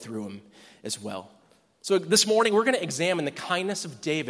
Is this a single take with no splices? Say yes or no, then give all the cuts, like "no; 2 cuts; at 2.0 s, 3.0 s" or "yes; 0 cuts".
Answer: yes; 0 cuts